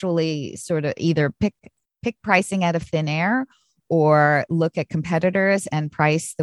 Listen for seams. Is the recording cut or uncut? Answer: uncut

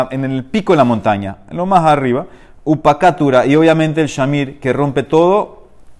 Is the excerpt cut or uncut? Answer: uncut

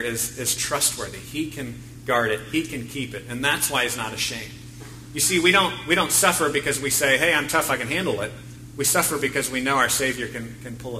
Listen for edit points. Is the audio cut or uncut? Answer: uncut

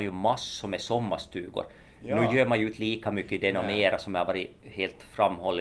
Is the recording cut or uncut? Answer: uncut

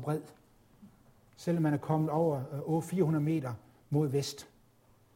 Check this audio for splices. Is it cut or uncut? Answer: uncut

